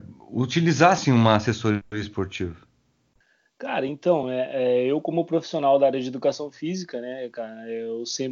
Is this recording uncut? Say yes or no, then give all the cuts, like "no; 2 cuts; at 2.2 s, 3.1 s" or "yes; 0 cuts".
yes; 0 cuts